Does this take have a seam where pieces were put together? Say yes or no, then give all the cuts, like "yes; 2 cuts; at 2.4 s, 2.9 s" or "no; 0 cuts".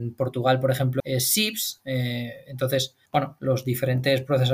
yes; 2 cuts; at 1.0 s, 3.1 s